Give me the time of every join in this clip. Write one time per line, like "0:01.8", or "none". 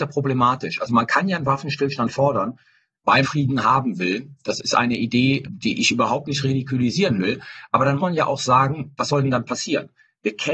0:03.2
0:05.4
0:08.0

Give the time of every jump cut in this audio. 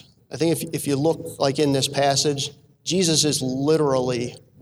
none

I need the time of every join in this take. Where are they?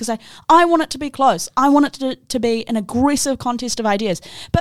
none

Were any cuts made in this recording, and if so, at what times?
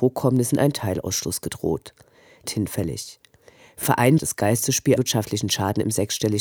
0:02.4
0:03.8
0:04.2
0:05.0

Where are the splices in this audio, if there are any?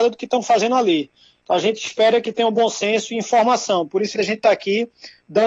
0:04.1

